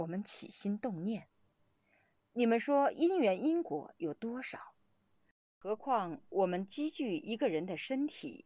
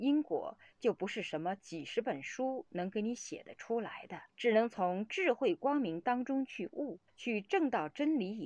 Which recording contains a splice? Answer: second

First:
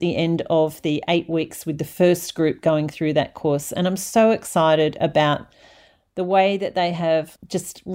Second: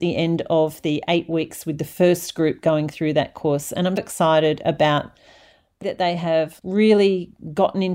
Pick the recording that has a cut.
second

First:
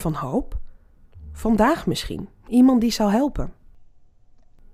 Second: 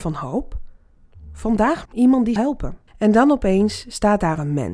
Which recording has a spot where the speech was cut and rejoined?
second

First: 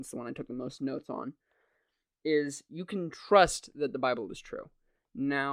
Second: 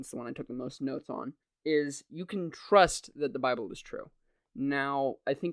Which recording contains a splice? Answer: second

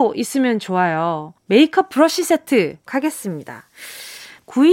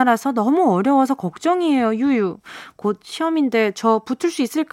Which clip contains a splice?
first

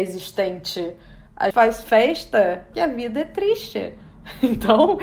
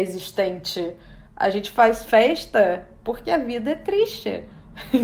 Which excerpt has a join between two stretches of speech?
first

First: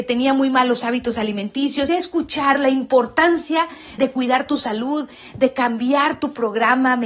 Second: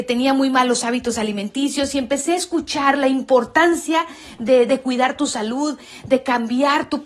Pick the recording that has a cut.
first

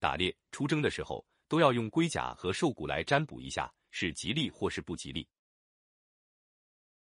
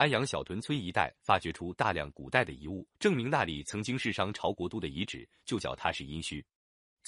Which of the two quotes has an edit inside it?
second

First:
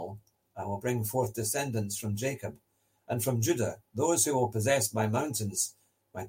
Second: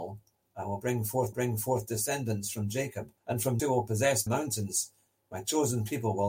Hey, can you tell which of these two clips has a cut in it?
second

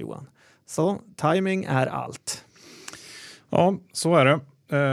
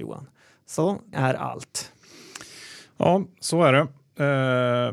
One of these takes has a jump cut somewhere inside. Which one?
second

